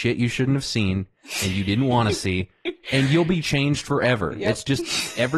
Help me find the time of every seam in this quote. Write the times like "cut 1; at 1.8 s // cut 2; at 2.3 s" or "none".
none